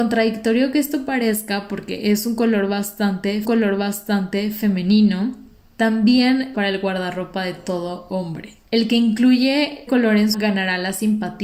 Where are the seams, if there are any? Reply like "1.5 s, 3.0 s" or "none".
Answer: 3.4 s, 6.5 s, 8.6 s, 9.9 s, 10.3 s